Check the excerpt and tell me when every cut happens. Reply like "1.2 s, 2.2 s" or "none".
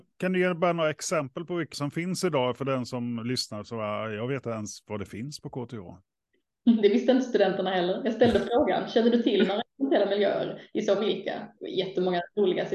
1.7 s, 4.4 s, 11.0 s